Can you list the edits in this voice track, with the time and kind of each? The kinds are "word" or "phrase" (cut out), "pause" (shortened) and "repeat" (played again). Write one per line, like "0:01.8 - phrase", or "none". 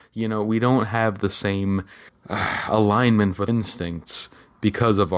0:02.1 - pause
0:03.5 - word